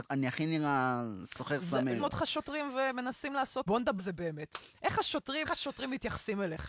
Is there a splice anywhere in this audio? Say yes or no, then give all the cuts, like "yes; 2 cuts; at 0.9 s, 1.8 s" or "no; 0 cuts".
yes; 5 cuts; at 2.0 s, 3.7 s, 4.0 s, 4.8 s, 5.5 s